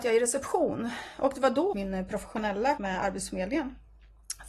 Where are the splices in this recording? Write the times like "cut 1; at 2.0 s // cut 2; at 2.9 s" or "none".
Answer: cut 1; at 1.7 s // cut 2; at 2.8 s